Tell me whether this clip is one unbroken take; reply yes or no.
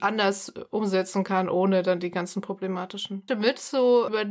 no